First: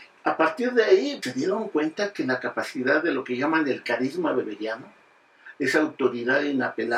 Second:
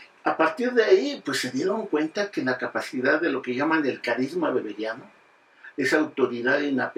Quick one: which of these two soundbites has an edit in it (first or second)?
first